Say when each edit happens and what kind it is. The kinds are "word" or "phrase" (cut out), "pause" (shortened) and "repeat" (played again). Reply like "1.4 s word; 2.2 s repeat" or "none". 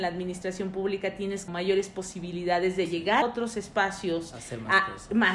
1.5 s word; 3.2 s word